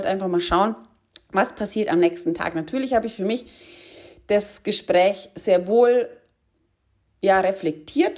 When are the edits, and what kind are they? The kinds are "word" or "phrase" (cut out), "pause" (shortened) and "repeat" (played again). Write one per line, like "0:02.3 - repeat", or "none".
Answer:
none